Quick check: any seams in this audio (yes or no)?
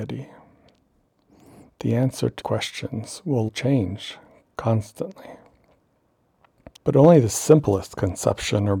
yes